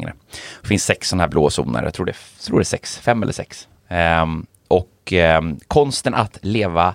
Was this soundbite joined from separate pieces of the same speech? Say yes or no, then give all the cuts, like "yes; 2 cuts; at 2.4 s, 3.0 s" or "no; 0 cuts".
no; 0 cuts